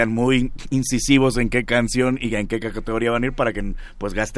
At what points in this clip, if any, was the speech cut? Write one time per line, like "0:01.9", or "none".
none